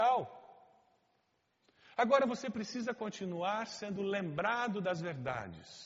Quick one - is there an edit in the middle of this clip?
no; 0 cuts

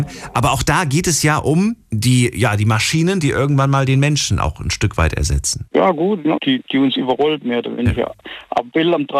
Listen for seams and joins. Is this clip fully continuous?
no; 3 cuts; at 1.8 s, 5.7 s, 6.4 s

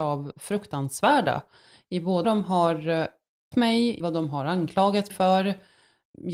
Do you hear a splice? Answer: yes; 4 cuts; at 2.2 s, 3.5 s, 4.0 s, 5.1 s

